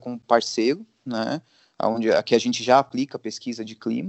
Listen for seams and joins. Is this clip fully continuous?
yes; 0 cuts

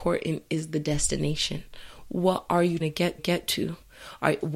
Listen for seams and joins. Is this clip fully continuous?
no; 2 cuts; at 2.8 s, 3.2 s

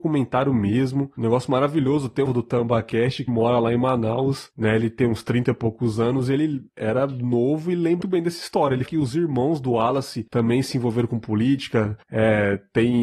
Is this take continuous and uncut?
no; 6 cuts; at 2.3 s, 3.3 s, 6.7 s, 8.0 s, 8.9 s, 12.0 s

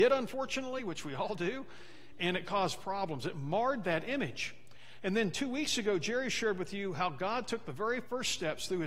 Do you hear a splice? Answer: no; 0 cuts

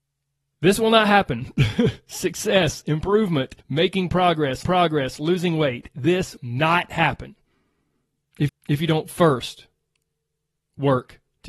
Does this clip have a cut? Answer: yes; 4 cuts; at 3.6 s, 4.6 s, 6.4 s, 8.5 s

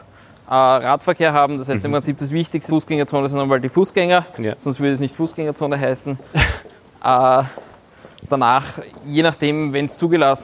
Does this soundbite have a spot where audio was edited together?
yes; 1 cut; at 2.7 s

